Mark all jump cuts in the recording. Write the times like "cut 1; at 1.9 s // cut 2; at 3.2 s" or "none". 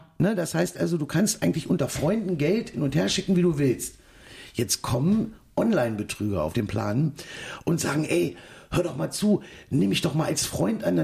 none